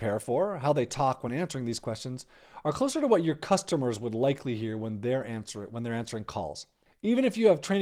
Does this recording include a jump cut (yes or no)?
no